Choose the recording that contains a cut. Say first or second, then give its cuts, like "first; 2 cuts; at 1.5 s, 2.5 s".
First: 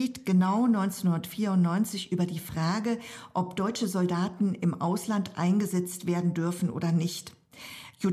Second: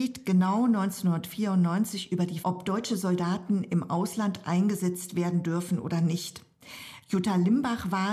second; 1 cut; at 2.4 s